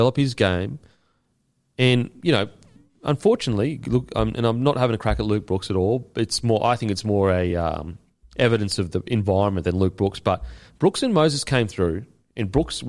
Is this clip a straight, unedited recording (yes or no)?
yes